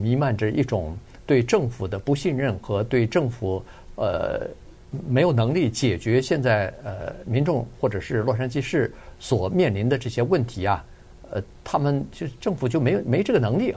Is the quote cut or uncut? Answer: uncut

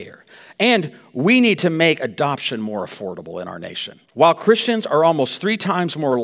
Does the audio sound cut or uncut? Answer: cut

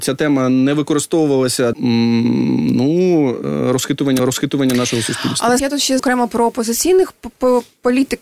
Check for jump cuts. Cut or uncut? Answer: cut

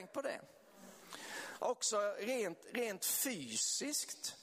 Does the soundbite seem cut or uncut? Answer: uncut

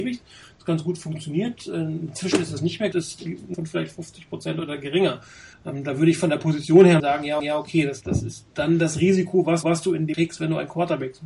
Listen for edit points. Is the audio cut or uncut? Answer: cut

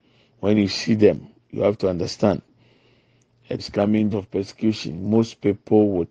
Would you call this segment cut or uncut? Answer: cut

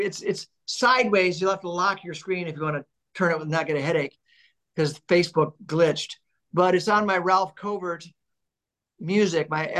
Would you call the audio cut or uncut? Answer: uncut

